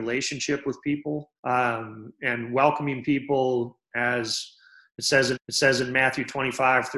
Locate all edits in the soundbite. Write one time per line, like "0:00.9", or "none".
0:01.4
0:05.4